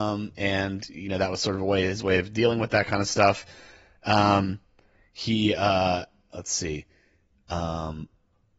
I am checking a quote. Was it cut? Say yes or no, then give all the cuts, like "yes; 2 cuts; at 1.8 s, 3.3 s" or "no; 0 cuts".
no; 0 cuts